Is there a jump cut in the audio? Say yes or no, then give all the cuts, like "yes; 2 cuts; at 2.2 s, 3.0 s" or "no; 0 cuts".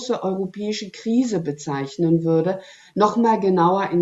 no; 0 cuts